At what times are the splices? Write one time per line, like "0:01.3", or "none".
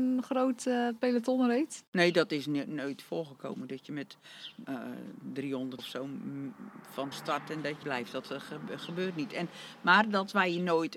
0:04.6
0:05.8
0:07.1
0:07.8